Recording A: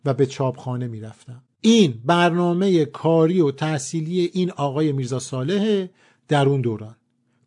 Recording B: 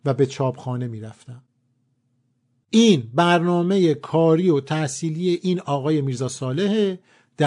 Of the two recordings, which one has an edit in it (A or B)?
A